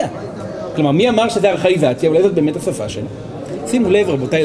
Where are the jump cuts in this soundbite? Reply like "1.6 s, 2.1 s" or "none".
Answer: none